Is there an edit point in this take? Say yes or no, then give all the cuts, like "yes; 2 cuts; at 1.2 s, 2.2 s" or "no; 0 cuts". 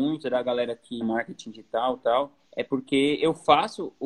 yes; 2 cuts; at 1.0 s, 2.5 s